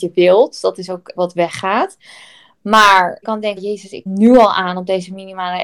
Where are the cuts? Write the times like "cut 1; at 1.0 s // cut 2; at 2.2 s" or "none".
cut 1; at 1.2 s // cut 2; at 3.2 s // cut 3; at 3.6 s // cut 4; at 4.1 s